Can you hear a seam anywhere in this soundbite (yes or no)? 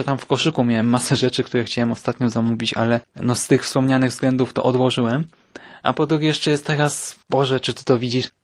yes